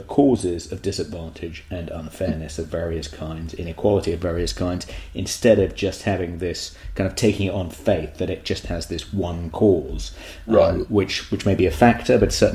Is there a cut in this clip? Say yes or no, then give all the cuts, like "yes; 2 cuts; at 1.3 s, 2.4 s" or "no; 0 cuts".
no; 0 cuts